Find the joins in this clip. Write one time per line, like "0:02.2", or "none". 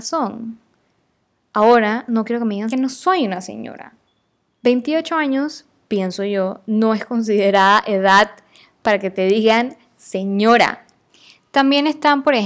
0:02.7
0:04.1